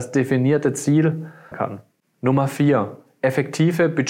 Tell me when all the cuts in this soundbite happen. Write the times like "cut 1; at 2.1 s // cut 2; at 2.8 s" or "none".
cut 1; at 1.5 s